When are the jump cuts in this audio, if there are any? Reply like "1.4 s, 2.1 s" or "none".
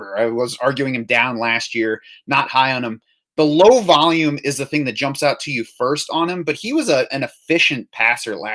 none